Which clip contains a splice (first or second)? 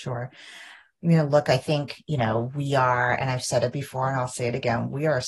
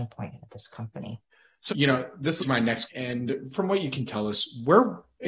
second